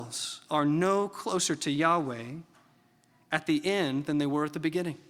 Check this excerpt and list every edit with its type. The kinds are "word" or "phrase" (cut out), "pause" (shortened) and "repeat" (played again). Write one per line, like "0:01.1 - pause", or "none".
none